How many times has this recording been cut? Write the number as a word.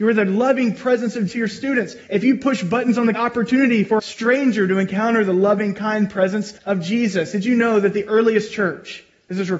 five